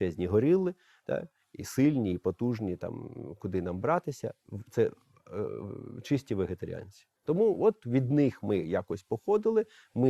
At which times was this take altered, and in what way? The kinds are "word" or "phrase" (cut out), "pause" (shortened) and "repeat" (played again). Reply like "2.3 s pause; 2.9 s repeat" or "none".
7.2 s pause